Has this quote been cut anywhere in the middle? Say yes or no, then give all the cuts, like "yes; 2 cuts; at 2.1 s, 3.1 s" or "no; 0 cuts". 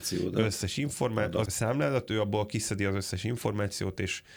yes; 1 cut; at 1.5 s